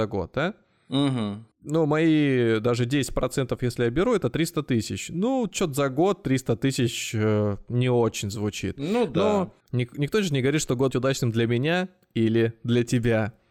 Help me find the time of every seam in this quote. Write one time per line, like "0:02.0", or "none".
0:01.5
0:09.6
0:10.9